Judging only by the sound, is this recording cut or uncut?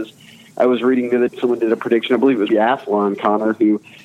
cut